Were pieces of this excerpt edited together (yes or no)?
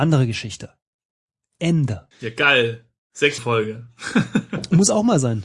yes